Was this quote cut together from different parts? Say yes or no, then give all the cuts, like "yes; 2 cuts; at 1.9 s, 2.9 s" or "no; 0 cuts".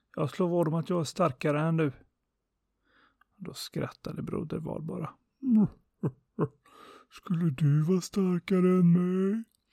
no; 0 cuts